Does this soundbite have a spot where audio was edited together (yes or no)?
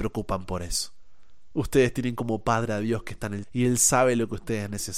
yes